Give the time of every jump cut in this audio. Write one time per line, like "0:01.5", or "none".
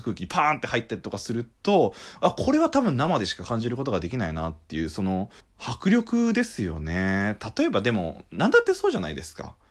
0:05.4